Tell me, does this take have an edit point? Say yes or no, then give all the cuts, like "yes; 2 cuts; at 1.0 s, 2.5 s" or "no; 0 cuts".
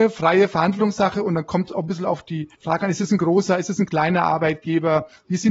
yes; 1 cut; at 2.5 s